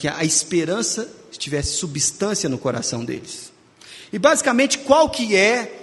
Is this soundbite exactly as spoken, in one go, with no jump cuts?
yes; 0 cuts

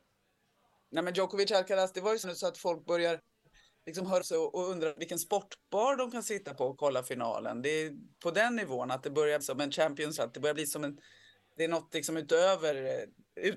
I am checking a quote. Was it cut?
yes; 5 cuts; at 2.2 s, 4.2 s, 5.0 s, 9.4 s, 10.2 s

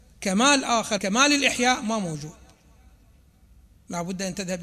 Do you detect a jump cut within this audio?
yes; 1 cut; at 1.0 s

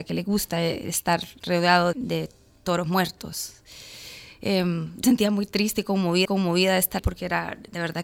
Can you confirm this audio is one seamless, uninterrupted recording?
no; 4 cuts; at 1.9 s, 5.0 s, 6.2 s, 7.0 s

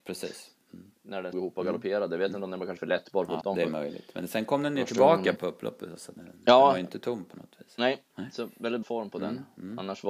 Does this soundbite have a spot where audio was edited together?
yes; 6 cuts; at 1.3 s, 2.8 s, 3.4 s, 5.4 s, 6.2 s, 8.8 s

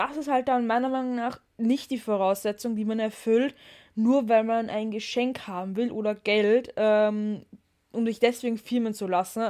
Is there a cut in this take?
no; 0 cuts

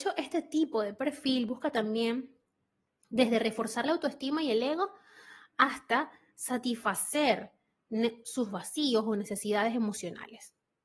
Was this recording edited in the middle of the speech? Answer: no; 0 cuts

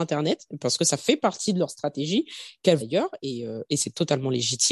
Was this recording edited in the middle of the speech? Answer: yes; 1 cut; at 2.8 s

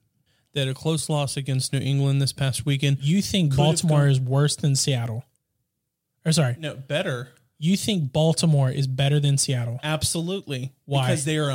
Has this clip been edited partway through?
no; 0 cuts

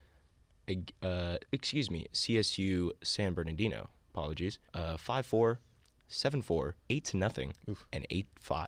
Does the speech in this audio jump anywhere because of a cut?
yes; 3 cuts; at 4.7 s, 6.8 s, 7.6 s

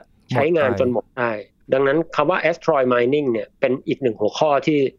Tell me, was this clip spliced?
no; 0 cuts

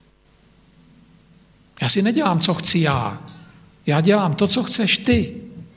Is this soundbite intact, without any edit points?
yes; 0 cuts

